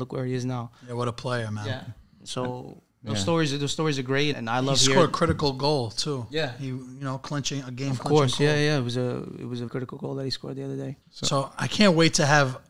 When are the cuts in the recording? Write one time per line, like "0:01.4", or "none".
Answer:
0:02.9
0:04.3
0:09.7
0:11.0